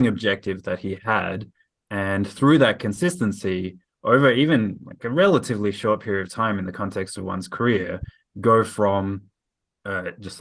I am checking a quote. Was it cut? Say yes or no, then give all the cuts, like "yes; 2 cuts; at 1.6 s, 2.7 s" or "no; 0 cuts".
no; 0 cuts